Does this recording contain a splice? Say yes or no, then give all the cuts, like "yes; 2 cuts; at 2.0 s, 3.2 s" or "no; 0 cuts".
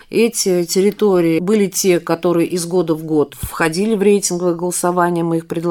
yes; 1 cut; at 3.3 s